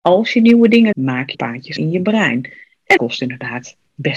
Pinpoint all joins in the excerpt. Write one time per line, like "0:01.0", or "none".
0:00.9
0:01.3
0:01.8
0:03.0